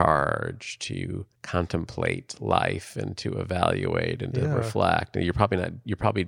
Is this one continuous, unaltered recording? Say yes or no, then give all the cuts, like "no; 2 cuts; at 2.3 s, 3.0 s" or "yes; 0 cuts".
no; 1 cut; at 1.4 s